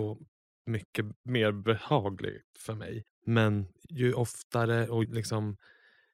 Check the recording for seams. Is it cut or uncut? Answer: cut